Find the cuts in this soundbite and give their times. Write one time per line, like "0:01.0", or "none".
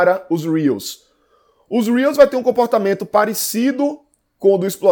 none